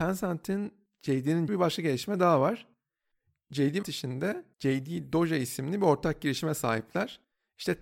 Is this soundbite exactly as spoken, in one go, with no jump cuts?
no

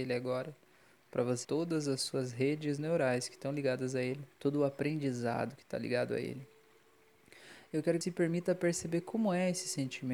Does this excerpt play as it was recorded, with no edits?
no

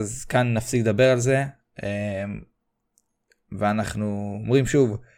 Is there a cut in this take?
no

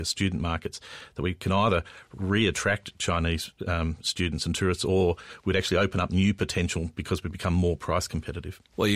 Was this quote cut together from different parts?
yes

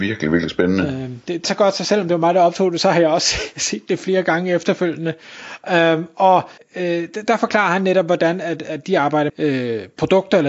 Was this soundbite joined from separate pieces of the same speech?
yes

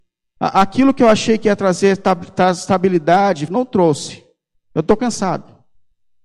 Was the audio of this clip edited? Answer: yes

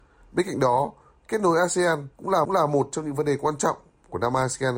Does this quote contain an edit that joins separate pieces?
yes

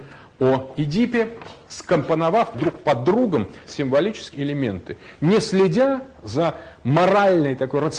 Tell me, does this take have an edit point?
yes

